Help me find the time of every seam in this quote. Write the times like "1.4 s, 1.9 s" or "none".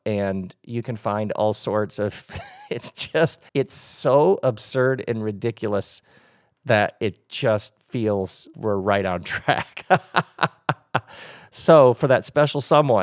3.5 s, 8.5 s